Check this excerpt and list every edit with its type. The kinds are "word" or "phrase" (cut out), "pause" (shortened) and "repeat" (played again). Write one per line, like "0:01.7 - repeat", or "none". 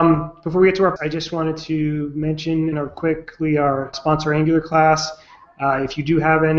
0:01.0 - word
0:02.7 - word
0:03.9 - word